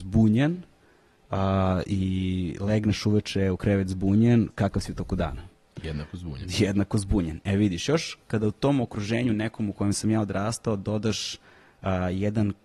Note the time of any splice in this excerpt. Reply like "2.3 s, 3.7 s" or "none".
none